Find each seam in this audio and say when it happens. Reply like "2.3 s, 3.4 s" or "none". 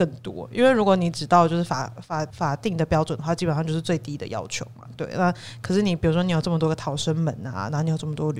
2.3 s